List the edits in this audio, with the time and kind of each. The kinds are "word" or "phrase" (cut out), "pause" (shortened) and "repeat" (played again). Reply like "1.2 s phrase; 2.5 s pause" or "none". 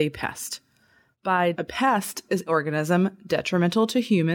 1.5 s word; 2.5 s word